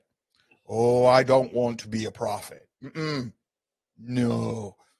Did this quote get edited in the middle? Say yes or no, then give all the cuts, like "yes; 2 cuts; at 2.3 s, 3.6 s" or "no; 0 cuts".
yes; 1 cut; at 2.7 s